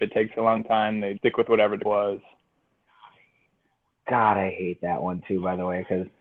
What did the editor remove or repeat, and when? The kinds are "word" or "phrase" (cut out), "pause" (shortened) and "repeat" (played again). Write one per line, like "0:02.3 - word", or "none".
0:01.2 - word
0:01.9 - word